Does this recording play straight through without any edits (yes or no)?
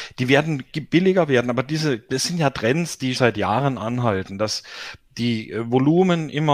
no